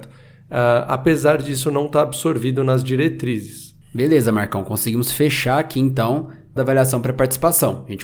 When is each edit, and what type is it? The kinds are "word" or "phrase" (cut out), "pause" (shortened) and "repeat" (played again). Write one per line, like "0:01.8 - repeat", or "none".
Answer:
0:03.8 - pause
0:06.6 - phrase